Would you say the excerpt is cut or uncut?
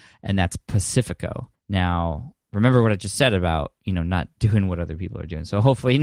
cut